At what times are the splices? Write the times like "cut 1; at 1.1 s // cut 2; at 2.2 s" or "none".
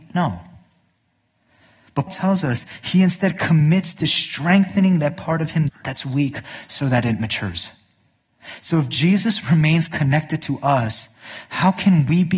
cut 1; at 2.1 s // cut 2; at 5.7 s